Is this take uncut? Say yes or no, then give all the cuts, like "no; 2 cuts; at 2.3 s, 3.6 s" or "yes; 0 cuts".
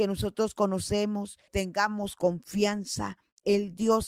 no; 1 cut; at 1.5 s